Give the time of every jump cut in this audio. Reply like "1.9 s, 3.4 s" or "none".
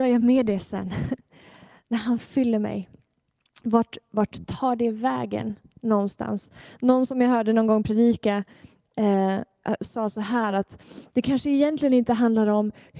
none